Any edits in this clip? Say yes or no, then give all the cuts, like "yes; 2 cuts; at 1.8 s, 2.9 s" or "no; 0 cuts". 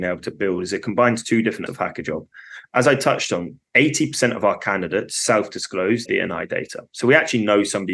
yes; 3 cuts; at 1.7 s, 3.7 s, 6.1 s